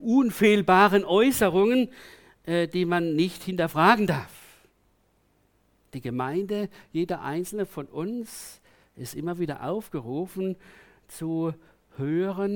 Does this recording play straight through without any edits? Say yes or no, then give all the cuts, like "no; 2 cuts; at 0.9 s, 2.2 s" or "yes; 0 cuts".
yes; 0 cuts